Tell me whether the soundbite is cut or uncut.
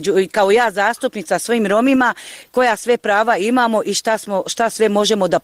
uncut